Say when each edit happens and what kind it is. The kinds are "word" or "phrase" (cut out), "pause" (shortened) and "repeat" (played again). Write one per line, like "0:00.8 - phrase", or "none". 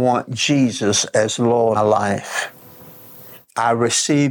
0:01.7 - phrase

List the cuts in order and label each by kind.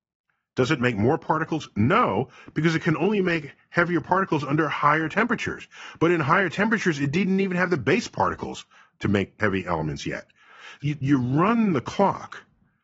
none

